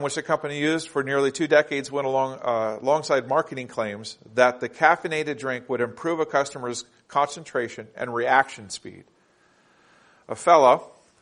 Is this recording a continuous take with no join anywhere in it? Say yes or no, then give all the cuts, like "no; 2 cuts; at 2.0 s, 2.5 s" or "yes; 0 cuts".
yes; 0 cuts